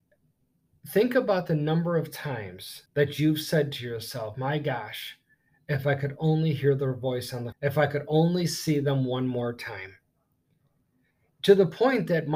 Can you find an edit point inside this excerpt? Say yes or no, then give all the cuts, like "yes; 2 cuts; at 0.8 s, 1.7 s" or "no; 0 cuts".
yes; 2 cuts; at 2.9 s, 7.5 s